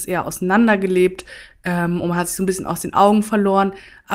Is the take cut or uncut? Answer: uncut